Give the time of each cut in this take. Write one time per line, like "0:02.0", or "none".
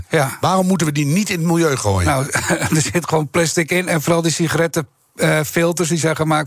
none